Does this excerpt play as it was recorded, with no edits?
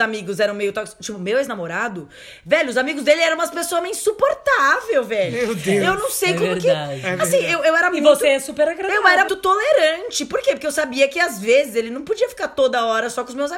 no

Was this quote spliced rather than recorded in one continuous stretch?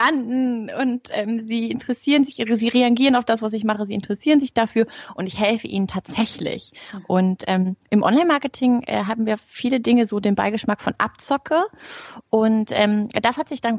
no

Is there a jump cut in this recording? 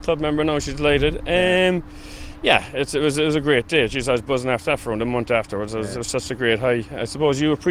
no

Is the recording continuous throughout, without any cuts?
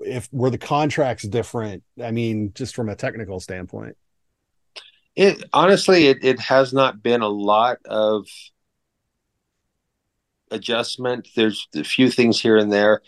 yes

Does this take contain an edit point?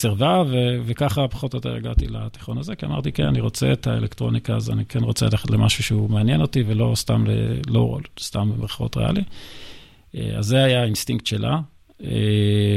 no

